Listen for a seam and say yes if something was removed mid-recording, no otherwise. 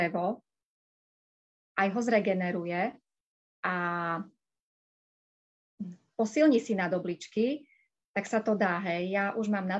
no